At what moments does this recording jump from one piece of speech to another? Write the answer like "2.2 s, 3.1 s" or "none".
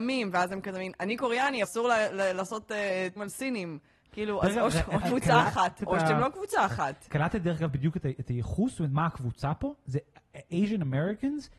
1.6 s, 3.2 s, 5.0 s, 5.8 s